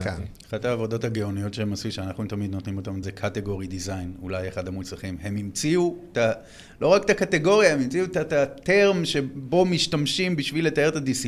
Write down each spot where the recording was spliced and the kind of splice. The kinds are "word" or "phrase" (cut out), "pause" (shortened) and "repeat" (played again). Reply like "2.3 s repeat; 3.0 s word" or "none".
3.0 s word